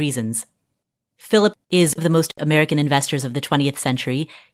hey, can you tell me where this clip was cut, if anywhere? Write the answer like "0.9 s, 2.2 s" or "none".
1.5 s, 2.0 s, 2.3 s